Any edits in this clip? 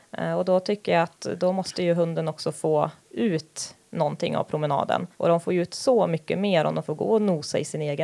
yes; 2 cuts; at 5.1 s, 6.8 s

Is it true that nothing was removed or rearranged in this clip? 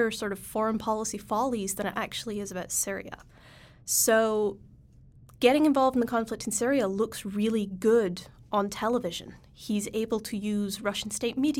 yes; 0 cuts

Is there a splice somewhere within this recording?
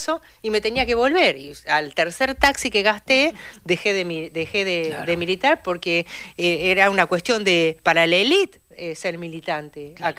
no; 0 cuts

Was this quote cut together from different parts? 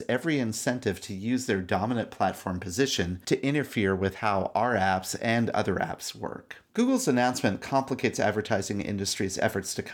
yes; 1 cut; at 6.7 s

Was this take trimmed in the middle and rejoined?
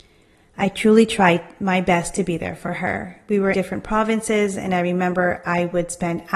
yes; 1 cut; at 3.5 s

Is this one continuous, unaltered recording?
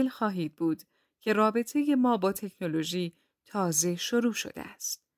yes; 0 cuts

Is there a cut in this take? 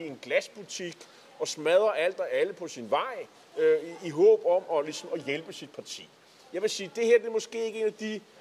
no; 0 cuts

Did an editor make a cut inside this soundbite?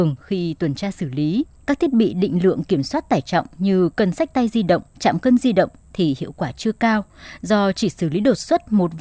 yes; 2 cuts; at 1.5 s, 4.9 s

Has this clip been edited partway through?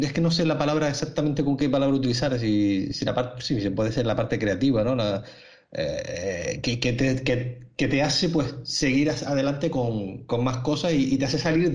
no; 0 cuts

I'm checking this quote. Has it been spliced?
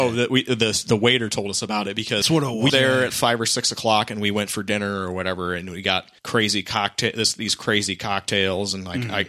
yes; 4 cuts; at 2.2 s, 2.7 s, 3.1 s, 6.2 s

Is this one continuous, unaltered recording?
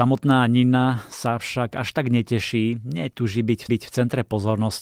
no; 1 cut; at 3.7 s

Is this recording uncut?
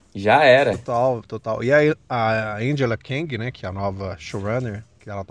yes; 0 cuts

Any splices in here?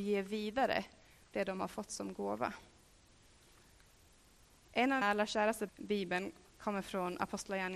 yes; 2 cuts; at 5.0 s, 5.7 s

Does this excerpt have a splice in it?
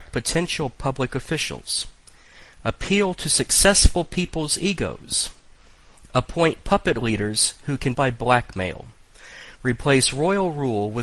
yes; 1 cut; at 7.9 s

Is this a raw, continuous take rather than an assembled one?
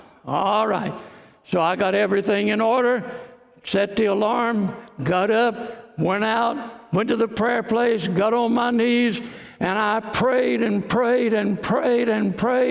yes; 0 cuts

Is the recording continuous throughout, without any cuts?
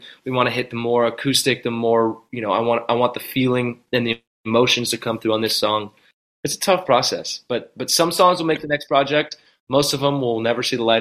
yes; 0 cuts

